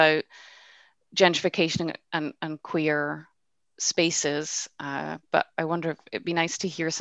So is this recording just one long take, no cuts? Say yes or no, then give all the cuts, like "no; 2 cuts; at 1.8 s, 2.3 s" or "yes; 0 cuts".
yes; 0 cuts